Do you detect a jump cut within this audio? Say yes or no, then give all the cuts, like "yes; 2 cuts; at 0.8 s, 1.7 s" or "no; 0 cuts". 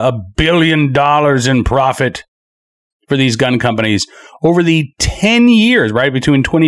no; 0 cuts